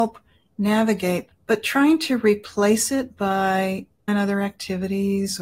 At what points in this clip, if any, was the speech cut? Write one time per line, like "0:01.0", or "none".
0:01.3